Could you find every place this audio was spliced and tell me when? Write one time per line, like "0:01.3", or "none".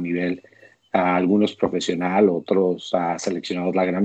none